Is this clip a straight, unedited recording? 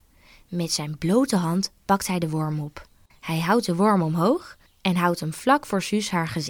no; 1 cut; at 3.1 s

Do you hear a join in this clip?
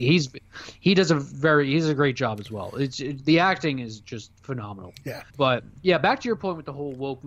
yes; 1 cut; at 5.3 s

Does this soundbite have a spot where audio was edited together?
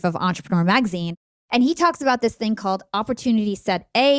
no; 0 cuts

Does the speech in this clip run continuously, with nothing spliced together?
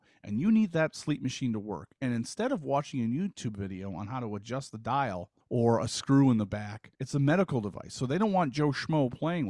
no; 2 cuts; at 5.4 s, 6.9 s

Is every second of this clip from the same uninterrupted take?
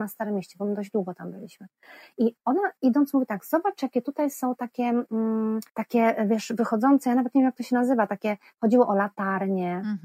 no; 1 cut; at 5.7 s

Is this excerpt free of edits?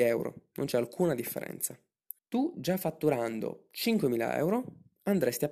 no; 1 cut; at 2.2 s

